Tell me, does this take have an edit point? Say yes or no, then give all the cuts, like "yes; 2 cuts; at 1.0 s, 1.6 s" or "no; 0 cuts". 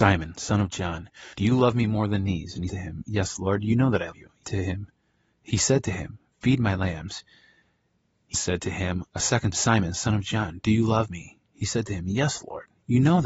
yes; 6 cuts; at 1.3 s, 2.7 s, 4.1 s, 4.4 s, 8.3 s, 9.5 s